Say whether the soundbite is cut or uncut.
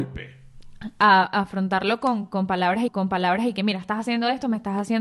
cut